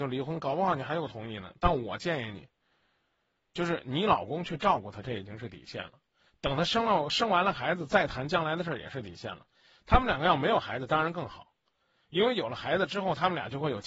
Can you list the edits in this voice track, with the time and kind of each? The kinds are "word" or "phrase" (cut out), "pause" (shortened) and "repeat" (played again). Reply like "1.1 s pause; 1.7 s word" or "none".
none